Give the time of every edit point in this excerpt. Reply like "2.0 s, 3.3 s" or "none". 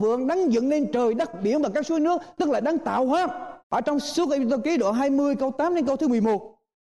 3.6 s